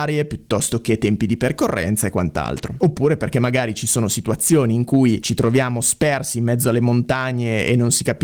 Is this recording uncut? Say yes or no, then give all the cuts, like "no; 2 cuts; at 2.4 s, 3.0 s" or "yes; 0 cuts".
yes; 0 cuts